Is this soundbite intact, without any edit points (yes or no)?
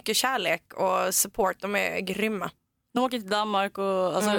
yes